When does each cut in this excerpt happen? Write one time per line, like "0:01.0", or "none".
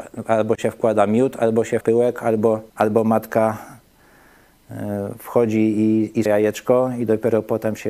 0:01.8
0:02.7
0:06.3